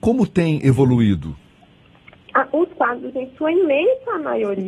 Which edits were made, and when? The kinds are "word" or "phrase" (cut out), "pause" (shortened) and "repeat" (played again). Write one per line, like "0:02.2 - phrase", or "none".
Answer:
none